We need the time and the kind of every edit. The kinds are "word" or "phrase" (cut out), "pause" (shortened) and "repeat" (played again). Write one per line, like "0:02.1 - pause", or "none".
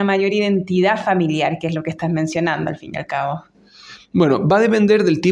none

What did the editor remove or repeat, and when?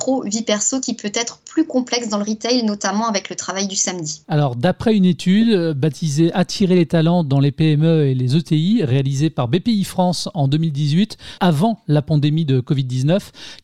0:11.4 - word

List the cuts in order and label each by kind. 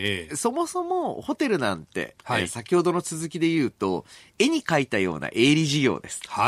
none

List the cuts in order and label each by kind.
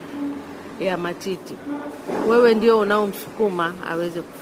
none

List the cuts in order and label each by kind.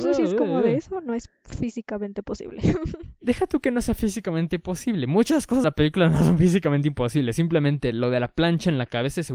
0:05.6 - word

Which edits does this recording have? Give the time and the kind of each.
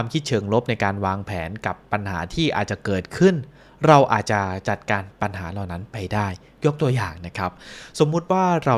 none

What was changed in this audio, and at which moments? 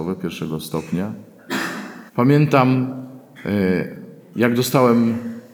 0:02.1 - pause

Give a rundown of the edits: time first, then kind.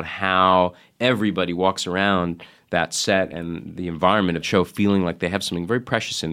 0:04.4 - word

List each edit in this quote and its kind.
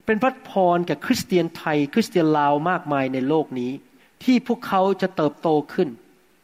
0:04.0 - pause

